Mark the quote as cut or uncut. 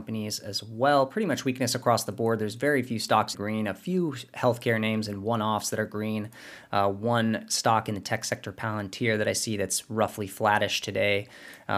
cut